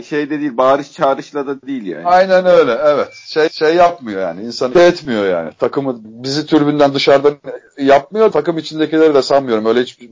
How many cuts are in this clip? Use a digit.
4